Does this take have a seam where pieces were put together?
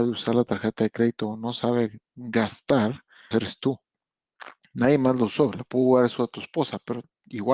yes; 1 cut; at 3.3 s

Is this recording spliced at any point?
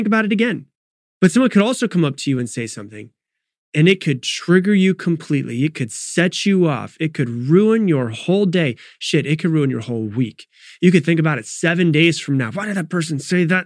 no; 0 cuts

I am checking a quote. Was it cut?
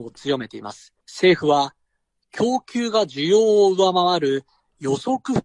yes; 1 cut; at 1.0 s

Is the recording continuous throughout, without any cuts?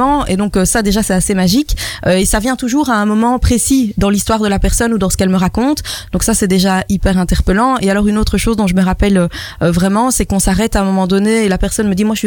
yes; 0 cuts

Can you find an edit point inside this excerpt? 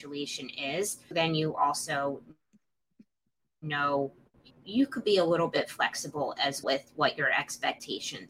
yes; 3 cuts; at 1.1 s, 4.5 s, 6.6 s

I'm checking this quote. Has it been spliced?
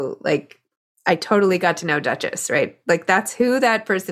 no; 0 cuts

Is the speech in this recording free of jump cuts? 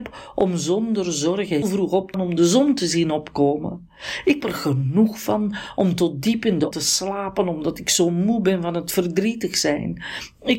no; 4 cuts; at 1.6 s, 2.1 s, 4.4 s, 6.7 s

